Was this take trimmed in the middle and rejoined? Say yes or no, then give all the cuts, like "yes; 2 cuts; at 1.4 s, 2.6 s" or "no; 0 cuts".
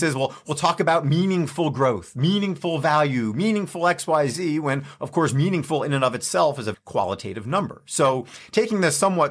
yes; 1 cut; at 6.7 s